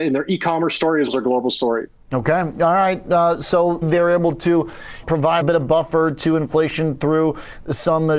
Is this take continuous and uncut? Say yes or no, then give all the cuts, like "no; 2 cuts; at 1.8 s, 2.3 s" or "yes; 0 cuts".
no; 4 cuts; at 1.1 s, 3.8 s, 5.0 s, 5.4 s